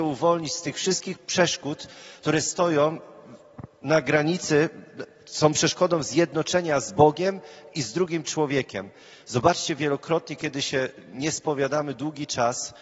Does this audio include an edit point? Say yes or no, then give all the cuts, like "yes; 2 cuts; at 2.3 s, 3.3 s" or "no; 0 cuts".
no; 0 cuts